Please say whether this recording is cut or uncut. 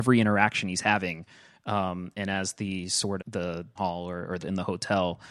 cut